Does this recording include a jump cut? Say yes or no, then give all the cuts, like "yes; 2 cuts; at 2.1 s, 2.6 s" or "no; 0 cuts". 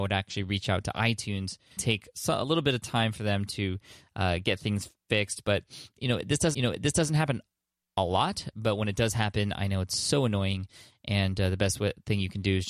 yes; 2 cuts; at 1.8 s, 6.5 s